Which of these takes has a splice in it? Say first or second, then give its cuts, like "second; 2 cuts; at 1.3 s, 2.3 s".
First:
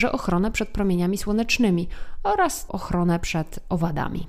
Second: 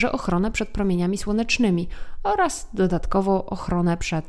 first; 1 cut; at 2.7 s